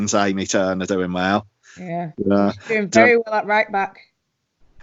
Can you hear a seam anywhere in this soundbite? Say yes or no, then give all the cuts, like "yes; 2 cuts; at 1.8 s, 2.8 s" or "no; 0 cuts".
yes; 1 cut; at 2.1 s